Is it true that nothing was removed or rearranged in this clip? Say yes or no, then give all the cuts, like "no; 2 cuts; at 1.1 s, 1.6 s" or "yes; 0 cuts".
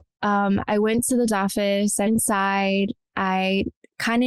no; 2 cuts; at 1.3 s, 2.1 s